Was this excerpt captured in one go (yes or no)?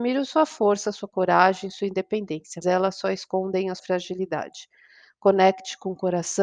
no